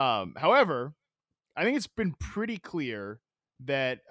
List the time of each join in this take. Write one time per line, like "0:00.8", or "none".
none

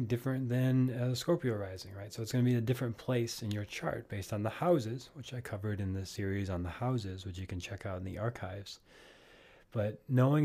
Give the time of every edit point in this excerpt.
none

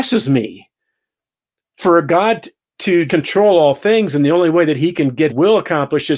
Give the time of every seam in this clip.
0:03.1
0:05.3

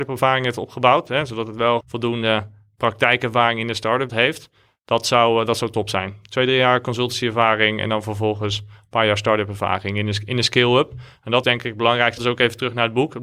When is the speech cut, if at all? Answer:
0:01.8
0:04.1
0:11.4
0:12.2

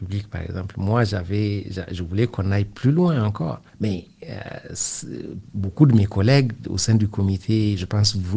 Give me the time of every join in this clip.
0:03.7

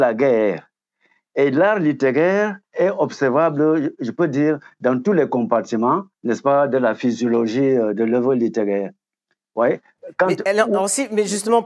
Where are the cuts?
0:02.6
0:06.1

